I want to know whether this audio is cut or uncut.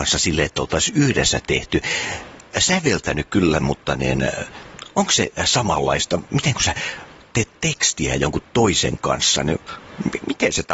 uncut